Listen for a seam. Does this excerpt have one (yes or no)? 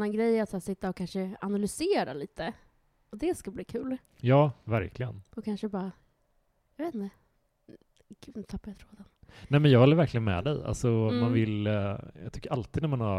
no